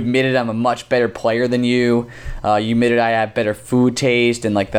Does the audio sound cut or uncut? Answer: uncut